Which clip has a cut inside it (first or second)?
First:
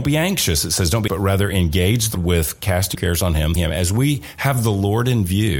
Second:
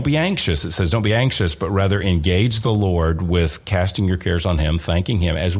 first